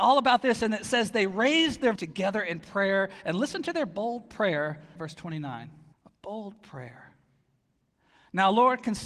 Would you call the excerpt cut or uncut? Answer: cut